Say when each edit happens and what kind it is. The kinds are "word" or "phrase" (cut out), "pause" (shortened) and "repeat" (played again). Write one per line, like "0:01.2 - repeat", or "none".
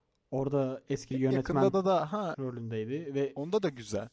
0:01.1 - word
0:02.3 - word